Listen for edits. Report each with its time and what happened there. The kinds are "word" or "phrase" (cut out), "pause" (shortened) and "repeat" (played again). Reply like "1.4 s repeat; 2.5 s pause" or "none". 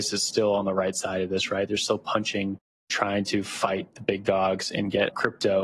none